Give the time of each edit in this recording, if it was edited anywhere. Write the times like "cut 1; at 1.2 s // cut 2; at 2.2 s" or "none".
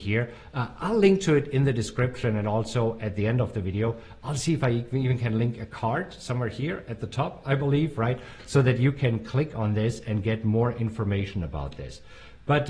none